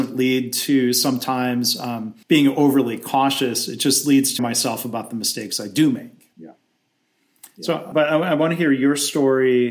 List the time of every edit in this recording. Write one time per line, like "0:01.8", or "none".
0:02.2
0:04.4
0:06.3
0:07.9